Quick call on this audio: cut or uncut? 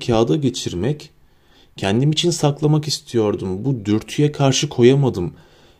uncut